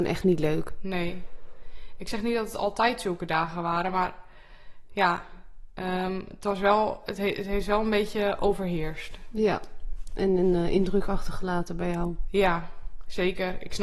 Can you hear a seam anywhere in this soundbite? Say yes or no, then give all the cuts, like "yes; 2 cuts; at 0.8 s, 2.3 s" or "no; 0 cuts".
no; 0 cuts